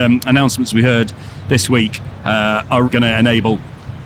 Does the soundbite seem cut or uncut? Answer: cut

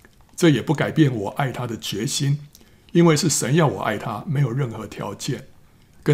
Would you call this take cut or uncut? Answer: uncut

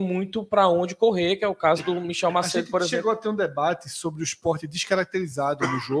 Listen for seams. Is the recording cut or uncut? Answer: uncut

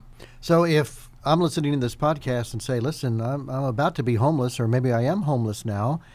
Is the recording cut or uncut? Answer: cut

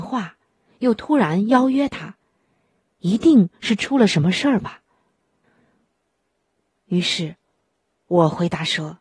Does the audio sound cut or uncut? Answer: uncut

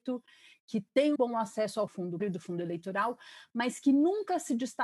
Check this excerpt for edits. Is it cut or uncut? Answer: cut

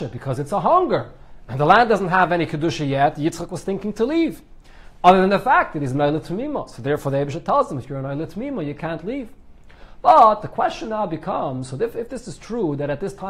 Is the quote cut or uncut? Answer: uncut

